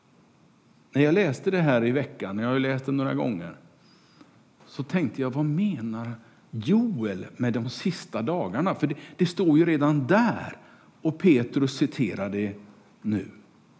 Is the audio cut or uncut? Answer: uncut